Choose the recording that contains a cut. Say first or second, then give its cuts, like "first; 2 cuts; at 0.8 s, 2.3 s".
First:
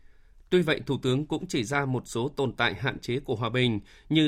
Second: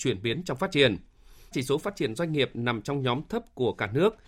second; 1 cut; at 1.5 s